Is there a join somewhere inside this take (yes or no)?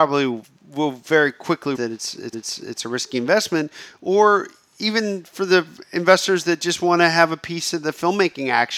yes